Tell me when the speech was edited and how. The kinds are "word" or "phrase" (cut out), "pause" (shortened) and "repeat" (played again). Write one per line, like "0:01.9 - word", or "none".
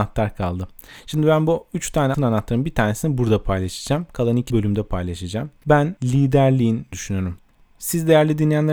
0:02.1 - word
0:04.5 - phrase
0:05.6 - pause
0:06.9 - phrase